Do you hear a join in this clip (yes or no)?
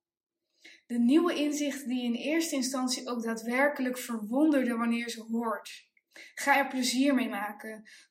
no